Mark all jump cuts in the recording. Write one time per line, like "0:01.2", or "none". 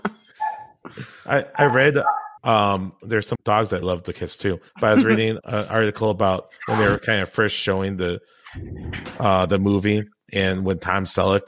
0:02.4
0:03.3
0:03.8
0:04.7
0:05.4